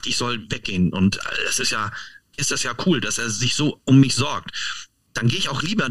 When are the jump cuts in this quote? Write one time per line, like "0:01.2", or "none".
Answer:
0:02.4